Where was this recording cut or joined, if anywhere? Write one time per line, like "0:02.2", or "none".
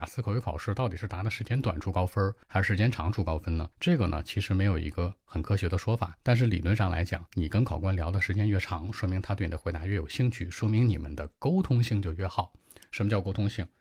0:02.4
0:03.7
0:06.2
0:07.3